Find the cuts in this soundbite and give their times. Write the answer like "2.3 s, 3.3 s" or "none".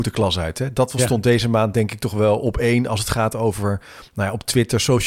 none